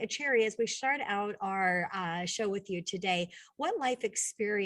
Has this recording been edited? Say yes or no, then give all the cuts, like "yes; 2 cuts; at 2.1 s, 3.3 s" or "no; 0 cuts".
no; 0 cuts